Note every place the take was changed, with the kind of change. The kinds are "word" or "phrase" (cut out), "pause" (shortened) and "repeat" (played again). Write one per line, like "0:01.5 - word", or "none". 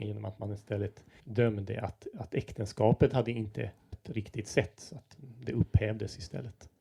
0:01.2 - pause
0:03.9 - phrase